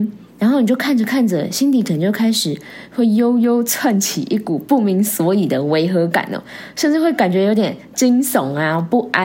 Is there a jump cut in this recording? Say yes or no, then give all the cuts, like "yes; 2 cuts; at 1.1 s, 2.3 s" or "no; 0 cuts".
no; 0 cuts